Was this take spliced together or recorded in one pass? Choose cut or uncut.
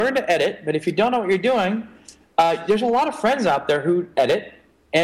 uncut